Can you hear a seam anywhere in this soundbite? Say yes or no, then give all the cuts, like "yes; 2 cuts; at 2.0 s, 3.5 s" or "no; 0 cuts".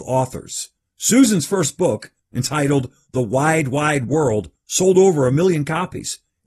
no; 0 cuts